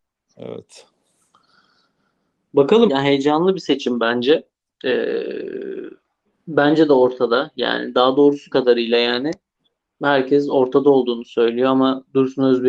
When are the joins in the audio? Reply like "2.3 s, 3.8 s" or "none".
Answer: 2.9 s, 6.2 s, 8.5 s, 9.5 s